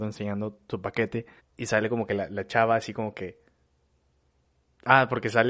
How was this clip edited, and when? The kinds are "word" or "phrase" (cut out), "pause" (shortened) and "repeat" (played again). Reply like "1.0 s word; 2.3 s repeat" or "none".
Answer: 1.4 s pause